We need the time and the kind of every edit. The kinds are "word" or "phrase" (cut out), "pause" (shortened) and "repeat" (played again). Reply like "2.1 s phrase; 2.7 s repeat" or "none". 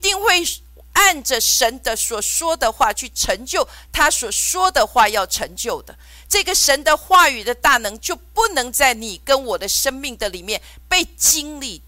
none